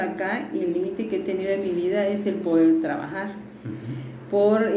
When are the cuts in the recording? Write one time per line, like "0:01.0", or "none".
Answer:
none